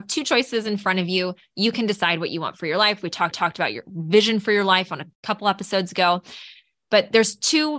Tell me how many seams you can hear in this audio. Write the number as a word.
two